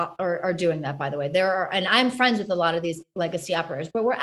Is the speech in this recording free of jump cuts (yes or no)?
yes